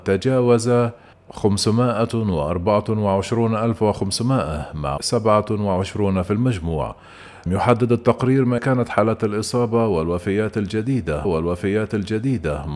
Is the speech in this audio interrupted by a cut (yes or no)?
yes